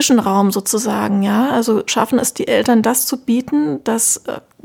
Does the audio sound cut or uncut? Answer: uncut